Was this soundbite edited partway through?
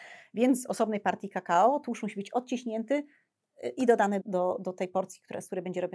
yes; 1 cut; at 4.2 s

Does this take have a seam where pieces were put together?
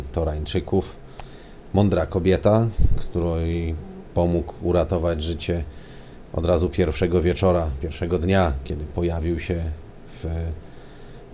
no; 0 cuts

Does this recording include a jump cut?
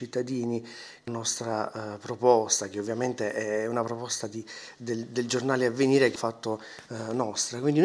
yes; 2 cuts; at 1.1 s, 6.2 s

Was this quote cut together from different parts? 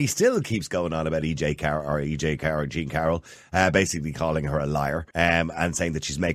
yes; 1 cut; at 5.1 s

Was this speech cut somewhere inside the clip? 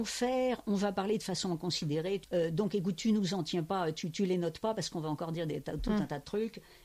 yes; 1 cut; at 2.2 s

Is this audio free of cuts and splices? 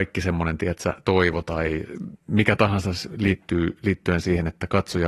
no; 1 cut; at 2.2 s

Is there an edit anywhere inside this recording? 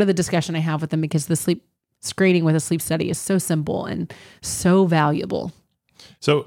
no; 0 cuts

